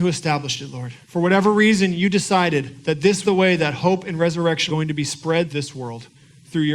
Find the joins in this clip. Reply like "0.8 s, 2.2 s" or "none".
1.0 s, 3.2 s, 4.7 s, 5.5 s